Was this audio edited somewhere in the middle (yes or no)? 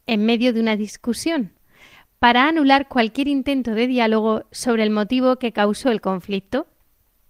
no